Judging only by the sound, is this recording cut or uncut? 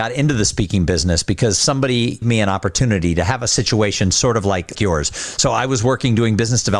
cut